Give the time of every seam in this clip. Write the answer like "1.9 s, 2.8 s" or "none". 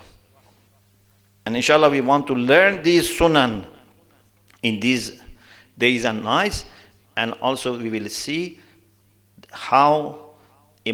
none